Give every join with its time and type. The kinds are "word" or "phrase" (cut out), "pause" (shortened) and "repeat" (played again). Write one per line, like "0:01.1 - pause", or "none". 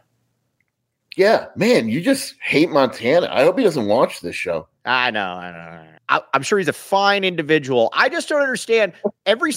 0:04.8 - pause
0:06.0 - pause